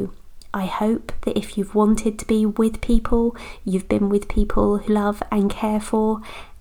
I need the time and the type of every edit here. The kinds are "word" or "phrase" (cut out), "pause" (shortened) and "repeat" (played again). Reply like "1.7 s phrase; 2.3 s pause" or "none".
4.9 s word